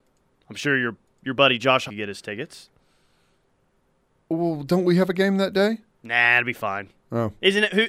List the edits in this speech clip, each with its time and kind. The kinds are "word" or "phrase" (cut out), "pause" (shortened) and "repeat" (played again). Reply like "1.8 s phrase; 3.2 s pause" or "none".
1.9 s word